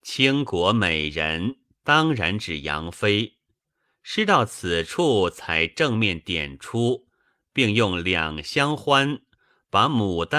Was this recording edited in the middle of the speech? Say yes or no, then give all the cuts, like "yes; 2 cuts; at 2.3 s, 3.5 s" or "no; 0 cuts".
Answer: no; 0 cuts